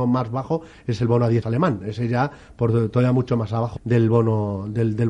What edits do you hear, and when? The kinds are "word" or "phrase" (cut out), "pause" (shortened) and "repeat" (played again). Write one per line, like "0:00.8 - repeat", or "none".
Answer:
0:01.4 - word
0:03.8 - word

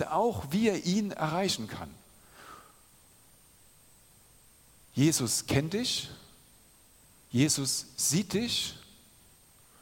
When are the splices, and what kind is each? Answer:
none

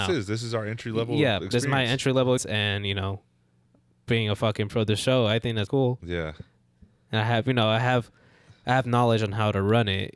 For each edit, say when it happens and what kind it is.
0:02.4 - word
0:04.7 - word
0:05.7 - word

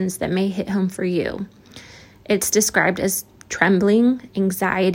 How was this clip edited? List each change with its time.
none

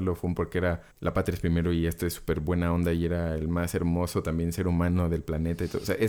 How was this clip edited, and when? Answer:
0:00.9 - pause

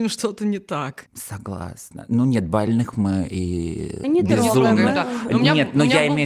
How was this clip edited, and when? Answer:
0:04.0 - word

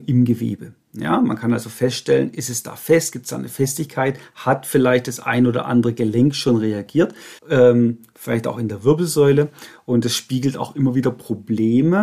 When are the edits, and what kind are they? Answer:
0:07.4 - pause

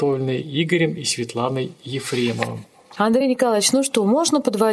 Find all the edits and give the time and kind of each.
none

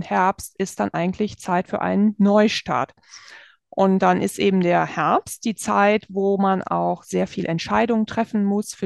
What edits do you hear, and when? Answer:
none

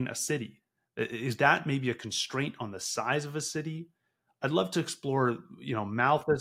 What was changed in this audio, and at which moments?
none

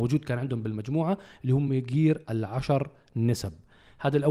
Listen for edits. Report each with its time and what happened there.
none

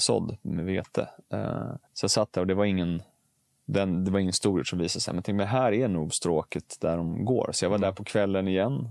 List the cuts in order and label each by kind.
0:01.8 - pause

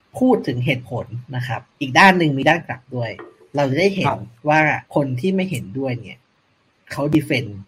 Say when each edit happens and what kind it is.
0:01.3 - pause
0:01.7 - pause
0:04.9 - pause

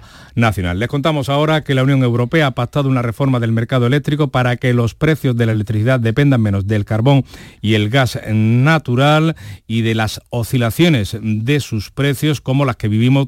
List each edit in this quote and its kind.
none

